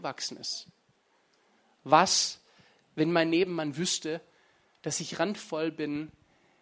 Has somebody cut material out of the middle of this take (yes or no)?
no